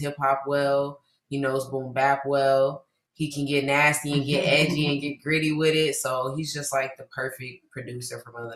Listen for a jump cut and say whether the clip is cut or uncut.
uncut